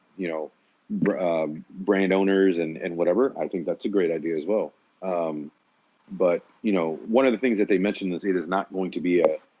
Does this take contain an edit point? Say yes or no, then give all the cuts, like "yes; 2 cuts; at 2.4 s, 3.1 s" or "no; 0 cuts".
yes; 2 cuts; at 4.9 s, 8.2 s